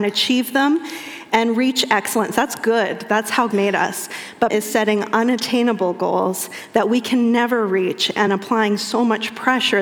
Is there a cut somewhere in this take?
yes; 3 cuts; at 3.5 s, 4.5 s, 8.3 s

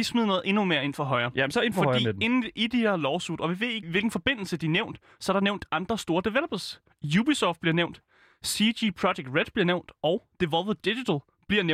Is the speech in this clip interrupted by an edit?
yes; 1 cut; at 3.8 s

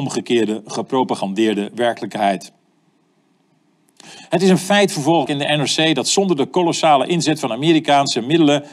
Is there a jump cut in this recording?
yes; 1 cut; at 5.3 s

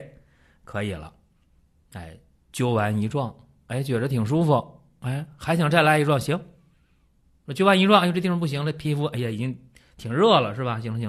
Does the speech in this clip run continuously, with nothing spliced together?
yes; 0 cuts

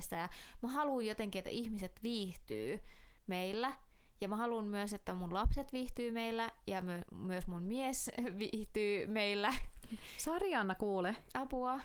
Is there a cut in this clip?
yes; 1 cut; at 3.2 s

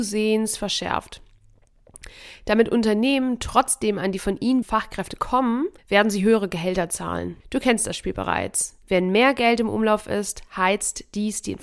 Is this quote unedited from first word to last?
no; 4 cuts; at 4.6 s, 5.8 s, 7.4 s, 8.8 s

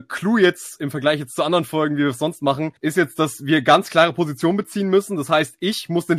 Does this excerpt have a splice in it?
yes; 1 cut; at 2.8 s

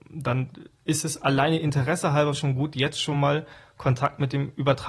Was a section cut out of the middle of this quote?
no; 0 cuts

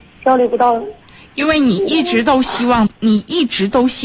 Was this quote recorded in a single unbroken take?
no; 1 cut; at 2.9 s

